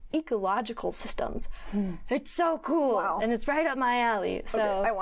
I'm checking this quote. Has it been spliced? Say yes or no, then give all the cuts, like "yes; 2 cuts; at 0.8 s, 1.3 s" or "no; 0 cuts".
no; 0 cuts